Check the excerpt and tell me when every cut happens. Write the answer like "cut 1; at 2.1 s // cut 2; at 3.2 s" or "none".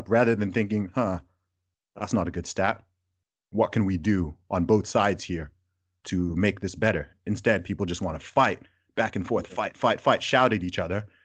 none